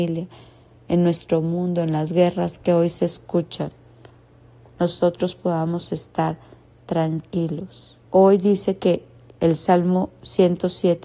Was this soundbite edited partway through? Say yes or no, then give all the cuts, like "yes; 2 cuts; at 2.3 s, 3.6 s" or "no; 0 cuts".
yes; 1 cut; at 8.1 s